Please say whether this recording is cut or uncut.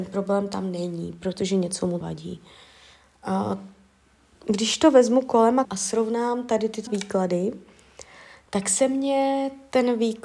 cut